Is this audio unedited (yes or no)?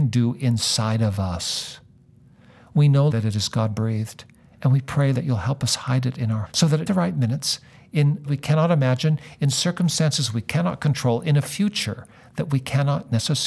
no